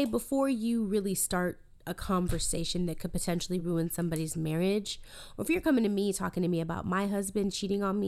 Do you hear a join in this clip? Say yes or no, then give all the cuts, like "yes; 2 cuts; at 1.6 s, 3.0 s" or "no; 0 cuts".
no; 0 cuts